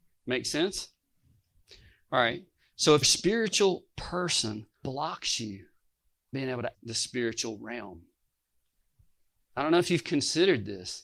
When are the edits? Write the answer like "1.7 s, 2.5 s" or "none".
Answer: 3.0 s, 4.8 s, 6.3 s, 6.7 s